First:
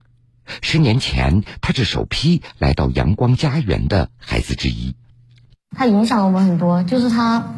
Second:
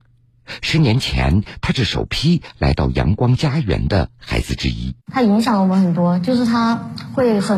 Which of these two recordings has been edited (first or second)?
second